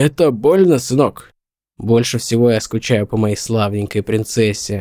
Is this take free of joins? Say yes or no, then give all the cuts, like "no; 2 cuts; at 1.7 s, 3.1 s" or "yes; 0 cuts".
yes; 0 cuts